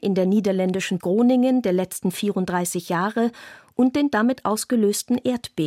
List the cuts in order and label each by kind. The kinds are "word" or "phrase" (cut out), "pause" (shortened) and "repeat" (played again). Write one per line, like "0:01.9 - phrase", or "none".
0:01.0 - word